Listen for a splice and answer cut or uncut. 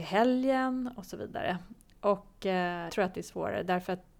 cut